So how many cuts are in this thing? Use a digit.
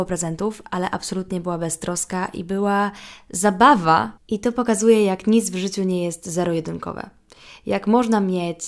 1